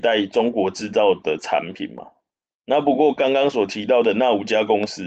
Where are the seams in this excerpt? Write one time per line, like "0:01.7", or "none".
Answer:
none